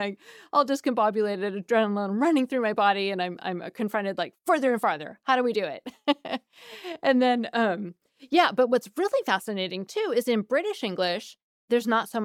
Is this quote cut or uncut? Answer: uncut